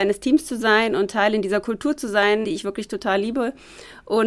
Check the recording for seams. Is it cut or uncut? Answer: cut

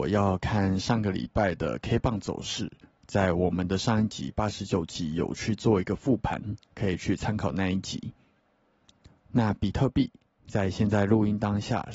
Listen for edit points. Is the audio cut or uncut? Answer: uncut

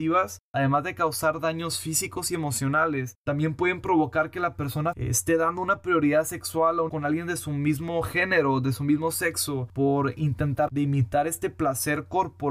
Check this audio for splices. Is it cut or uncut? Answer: cut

